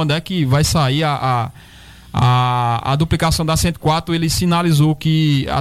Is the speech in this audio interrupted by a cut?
no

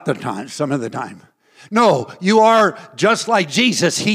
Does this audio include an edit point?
no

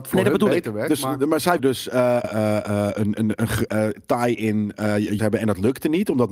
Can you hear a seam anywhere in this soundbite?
yes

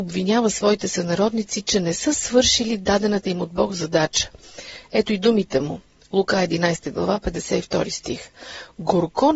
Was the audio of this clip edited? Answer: no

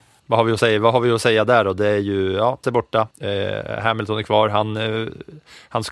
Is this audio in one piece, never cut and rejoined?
no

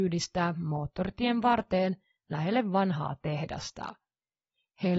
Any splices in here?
no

